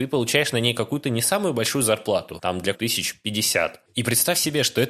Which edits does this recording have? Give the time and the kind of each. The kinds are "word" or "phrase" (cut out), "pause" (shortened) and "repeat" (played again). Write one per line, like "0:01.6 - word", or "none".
0:02.7 - phrase